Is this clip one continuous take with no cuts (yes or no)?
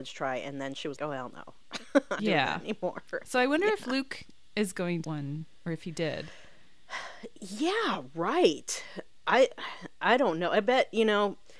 no